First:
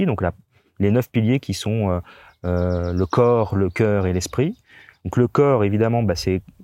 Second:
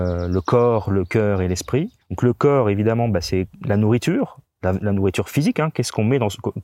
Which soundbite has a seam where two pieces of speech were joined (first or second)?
second